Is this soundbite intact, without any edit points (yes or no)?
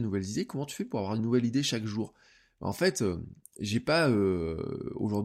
yes